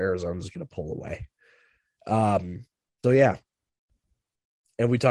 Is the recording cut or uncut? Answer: cut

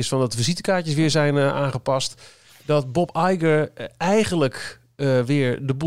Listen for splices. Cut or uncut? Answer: uncut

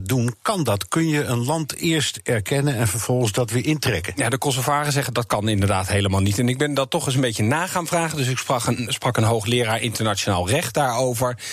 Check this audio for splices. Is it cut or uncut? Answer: uncut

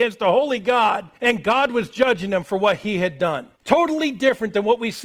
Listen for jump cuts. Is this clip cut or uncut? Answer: cut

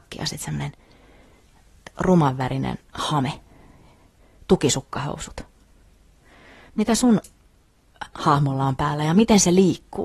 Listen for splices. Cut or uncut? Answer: uncut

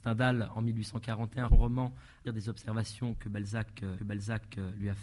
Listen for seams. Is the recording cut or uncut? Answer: cut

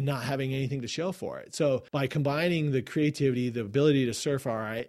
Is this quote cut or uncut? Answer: cut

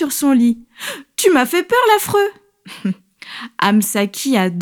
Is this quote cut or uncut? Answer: uncut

